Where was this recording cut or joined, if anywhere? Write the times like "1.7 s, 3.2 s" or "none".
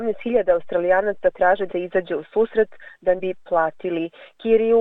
1.3 s, 1.7 s, 3.2 s